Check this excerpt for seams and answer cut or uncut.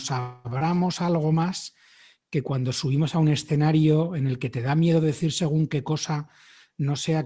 uncut